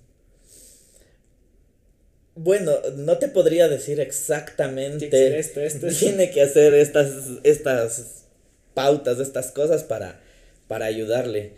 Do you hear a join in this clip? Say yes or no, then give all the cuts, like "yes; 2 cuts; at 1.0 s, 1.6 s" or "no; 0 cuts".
no; 0 cuts